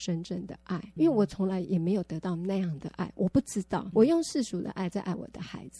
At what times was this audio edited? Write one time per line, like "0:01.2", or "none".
0:01.0
0:03.9